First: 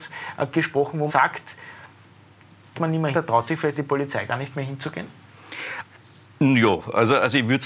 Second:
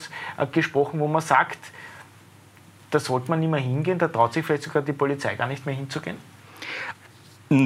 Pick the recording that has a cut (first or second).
first